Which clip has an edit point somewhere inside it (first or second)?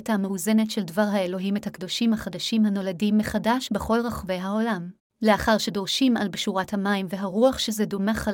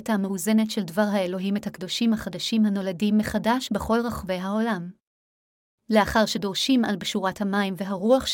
first